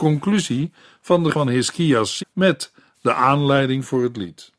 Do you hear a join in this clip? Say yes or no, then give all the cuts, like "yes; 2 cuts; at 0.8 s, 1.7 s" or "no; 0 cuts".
yes; 2 cuts; at 1.3 s, 2.2 s